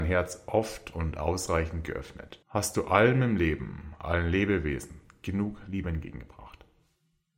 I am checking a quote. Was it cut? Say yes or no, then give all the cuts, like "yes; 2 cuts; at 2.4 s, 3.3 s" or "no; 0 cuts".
yes; 1 cut; at 2.4 s